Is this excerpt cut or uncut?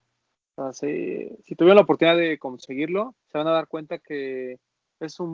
cut